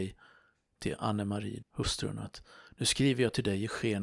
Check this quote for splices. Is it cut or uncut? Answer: cut